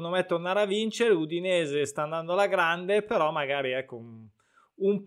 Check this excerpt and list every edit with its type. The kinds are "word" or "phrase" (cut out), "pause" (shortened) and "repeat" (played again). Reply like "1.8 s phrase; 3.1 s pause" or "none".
none